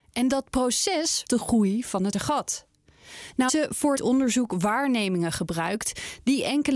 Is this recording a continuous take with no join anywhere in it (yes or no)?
no